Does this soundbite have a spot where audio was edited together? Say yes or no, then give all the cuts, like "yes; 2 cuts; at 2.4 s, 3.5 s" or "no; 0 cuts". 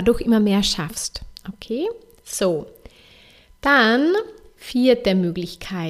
no; 0 cuts